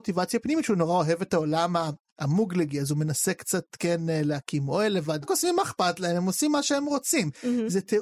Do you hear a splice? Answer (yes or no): yes